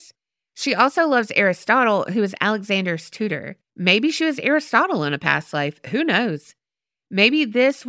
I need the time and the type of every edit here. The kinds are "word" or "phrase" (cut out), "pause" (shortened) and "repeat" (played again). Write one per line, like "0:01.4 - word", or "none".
0:03.6 - pause